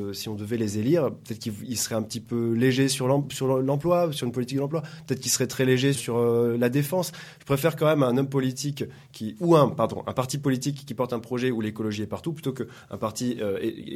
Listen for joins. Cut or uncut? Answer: cut